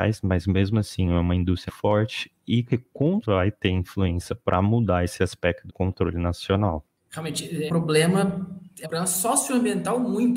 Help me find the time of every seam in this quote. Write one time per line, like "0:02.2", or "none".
0:01.7
0:03.2
0:05.7
0:07.7
0:08.8

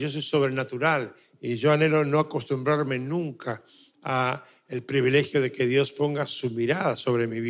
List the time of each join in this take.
none

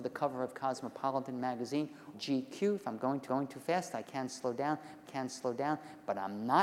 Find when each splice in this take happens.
0:02.1
0:03.3
0:05.0

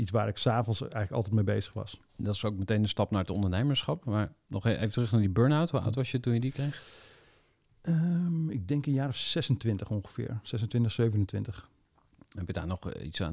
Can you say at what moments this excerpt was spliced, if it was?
0:02.1

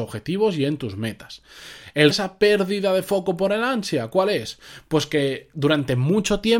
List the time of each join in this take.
0:02.1

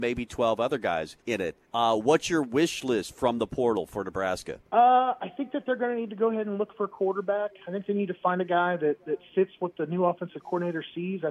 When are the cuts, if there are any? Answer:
0:01.2
0:01.6
0:04.7

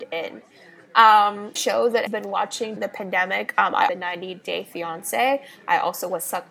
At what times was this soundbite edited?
0:01.6
0:02.1
0:02.8
0:03.9

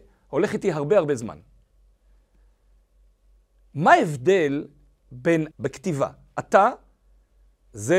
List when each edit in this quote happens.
0:05.5

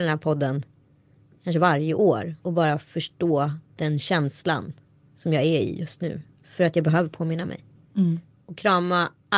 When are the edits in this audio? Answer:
0:02.4

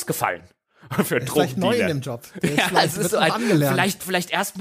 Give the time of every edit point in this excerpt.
none

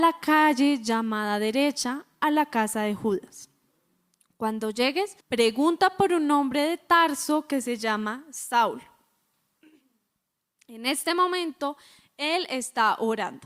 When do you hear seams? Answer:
0:05.2

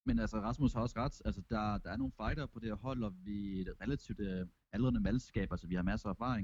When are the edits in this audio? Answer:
none

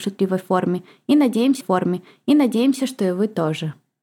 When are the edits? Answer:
0:01.6

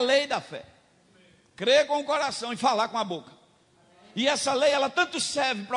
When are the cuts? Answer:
none

